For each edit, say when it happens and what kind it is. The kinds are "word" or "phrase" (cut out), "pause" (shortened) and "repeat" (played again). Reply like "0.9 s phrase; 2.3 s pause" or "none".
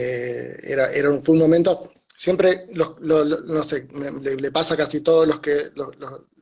none